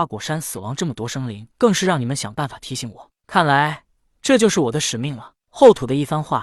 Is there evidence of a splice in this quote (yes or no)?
yes